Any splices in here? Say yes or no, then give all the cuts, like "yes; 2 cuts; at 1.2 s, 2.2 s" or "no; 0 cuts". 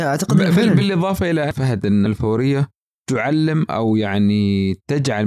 yes; 2 cuts; at 1.5 s, 2.1 s